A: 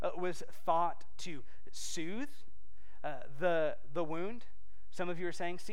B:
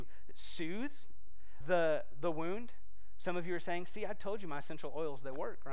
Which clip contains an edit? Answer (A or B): B